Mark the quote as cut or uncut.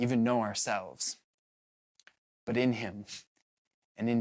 uncut